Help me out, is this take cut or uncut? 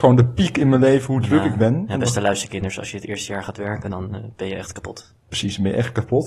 uncut